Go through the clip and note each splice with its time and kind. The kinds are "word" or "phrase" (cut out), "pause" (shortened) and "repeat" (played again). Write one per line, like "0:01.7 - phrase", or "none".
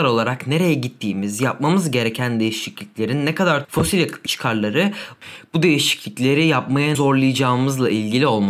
0:03.6 - phrase
0:04.3 - phrase
0:06.9 - word